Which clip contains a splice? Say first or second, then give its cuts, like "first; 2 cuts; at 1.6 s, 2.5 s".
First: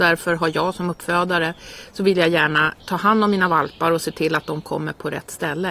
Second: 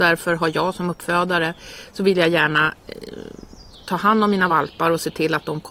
first; 1 cut; at 2.8 s